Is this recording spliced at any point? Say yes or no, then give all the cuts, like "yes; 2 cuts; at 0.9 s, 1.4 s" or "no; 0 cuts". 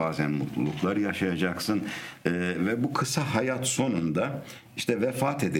no; 0 cuts